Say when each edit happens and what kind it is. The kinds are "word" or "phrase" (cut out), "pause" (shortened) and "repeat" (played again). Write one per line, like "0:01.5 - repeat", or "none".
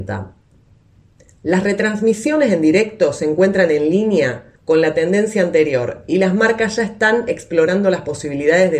0:04.6 - pause